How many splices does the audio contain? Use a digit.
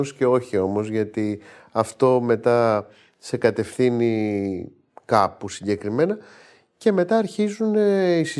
0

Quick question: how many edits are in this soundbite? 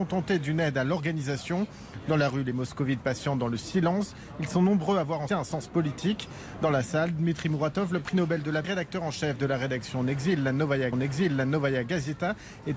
3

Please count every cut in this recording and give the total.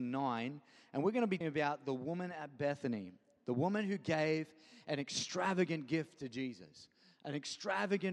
1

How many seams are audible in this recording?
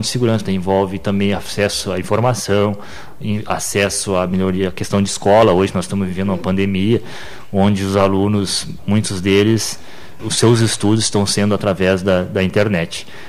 1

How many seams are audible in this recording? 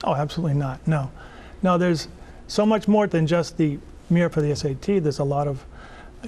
2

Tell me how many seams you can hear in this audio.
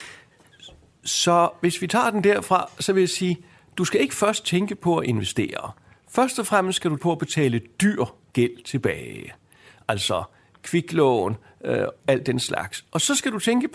2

